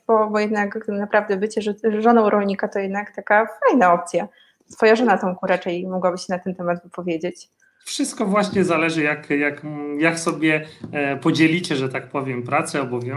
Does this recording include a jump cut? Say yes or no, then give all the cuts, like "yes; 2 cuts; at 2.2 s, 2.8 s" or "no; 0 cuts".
no; 0 cuts